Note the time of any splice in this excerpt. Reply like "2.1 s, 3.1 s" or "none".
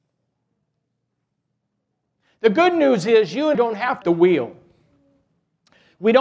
3.5 s, 4.0 s